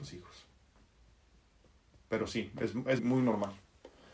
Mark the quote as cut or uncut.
cut